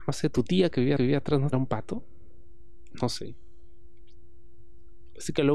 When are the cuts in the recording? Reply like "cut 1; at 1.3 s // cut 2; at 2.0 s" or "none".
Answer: cut 1; at 1.0 s // cut 2; at 1.5 s